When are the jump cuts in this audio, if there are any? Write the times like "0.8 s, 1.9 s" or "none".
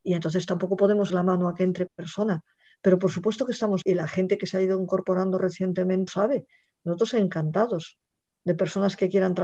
1.1 s, 1.9 s, 3.8 s, 6.1 s